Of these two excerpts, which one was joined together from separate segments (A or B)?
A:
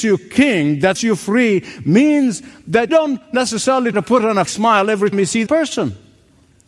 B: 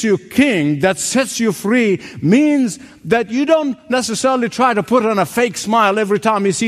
A